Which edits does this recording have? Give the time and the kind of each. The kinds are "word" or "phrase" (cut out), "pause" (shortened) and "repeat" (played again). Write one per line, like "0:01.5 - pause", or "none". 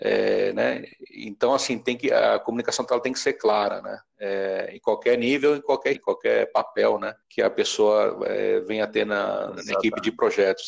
0:05.9 - word
0:07.2 - pause